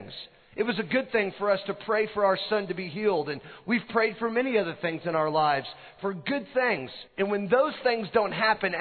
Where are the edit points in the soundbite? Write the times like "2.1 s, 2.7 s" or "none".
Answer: 7.1 s